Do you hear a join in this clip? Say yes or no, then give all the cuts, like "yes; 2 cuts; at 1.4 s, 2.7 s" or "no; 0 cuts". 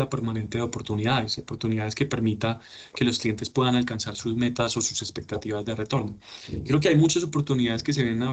no; 0 cuts